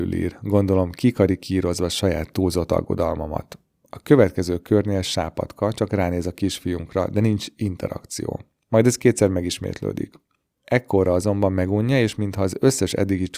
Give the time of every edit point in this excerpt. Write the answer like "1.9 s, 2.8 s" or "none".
none